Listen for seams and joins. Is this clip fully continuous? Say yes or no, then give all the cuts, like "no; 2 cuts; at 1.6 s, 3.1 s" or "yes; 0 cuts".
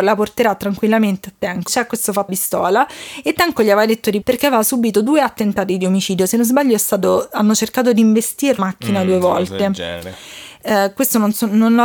no; 4 cuts; at 1.7 s, 2.3 s, 4.2 s, 8.6 s